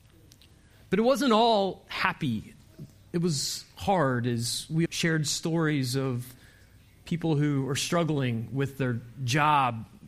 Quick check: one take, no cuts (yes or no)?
no